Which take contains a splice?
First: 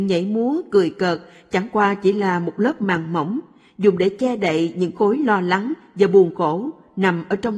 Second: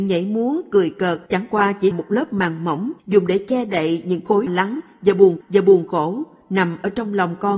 second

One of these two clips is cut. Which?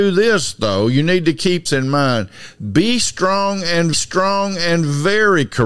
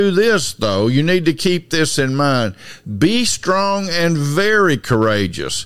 first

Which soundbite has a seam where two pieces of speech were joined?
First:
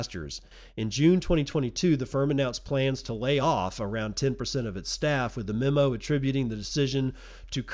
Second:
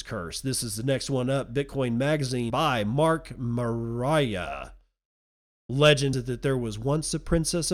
second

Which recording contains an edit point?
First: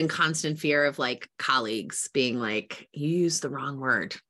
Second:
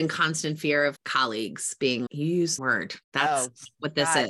second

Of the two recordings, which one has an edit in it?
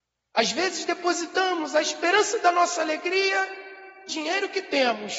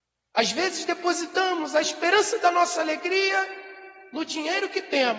first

